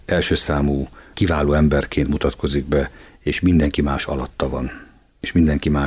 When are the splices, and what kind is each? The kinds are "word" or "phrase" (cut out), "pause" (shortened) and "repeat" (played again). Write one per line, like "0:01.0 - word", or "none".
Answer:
none